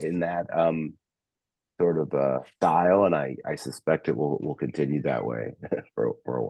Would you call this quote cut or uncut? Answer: cut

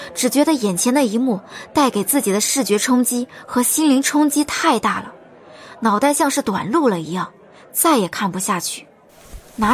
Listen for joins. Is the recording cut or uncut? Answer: uncut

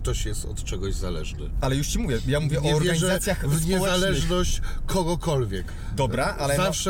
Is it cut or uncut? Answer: uncut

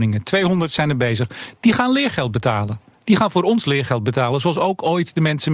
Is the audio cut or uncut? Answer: uncut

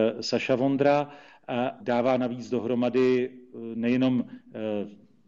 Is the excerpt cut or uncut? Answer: cut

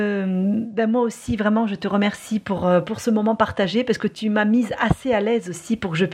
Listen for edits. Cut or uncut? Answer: uncut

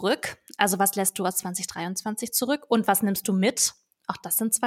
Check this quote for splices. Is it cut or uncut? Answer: uncut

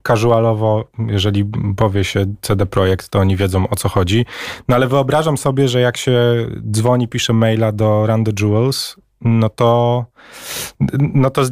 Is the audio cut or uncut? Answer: uncut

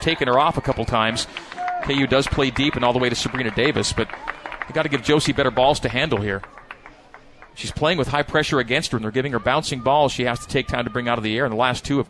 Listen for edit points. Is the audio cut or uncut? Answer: uncut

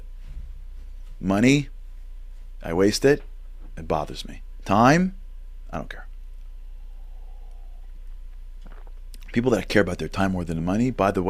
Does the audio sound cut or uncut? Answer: uncut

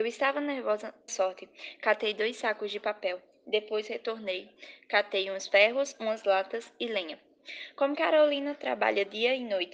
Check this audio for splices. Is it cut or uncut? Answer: cut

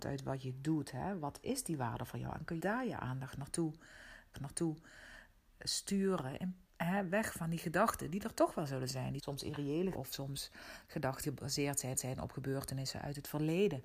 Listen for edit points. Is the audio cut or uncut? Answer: cut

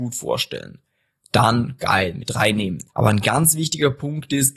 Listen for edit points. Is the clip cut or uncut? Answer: cut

